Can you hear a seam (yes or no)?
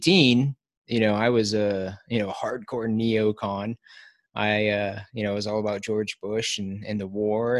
no